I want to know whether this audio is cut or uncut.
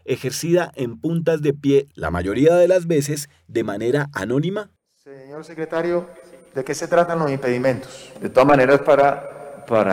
uncut